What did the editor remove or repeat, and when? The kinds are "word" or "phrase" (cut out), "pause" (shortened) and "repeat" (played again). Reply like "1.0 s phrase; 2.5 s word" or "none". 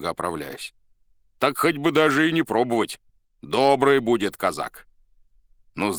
none